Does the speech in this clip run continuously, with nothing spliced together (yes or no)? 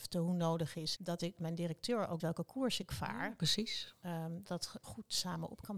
no